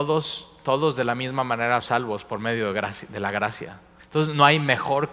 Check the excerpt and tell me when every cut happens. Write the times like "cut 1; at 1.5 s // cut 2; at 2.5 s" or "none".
cut 1; at 1.8 s // cut 2; at 4.0 s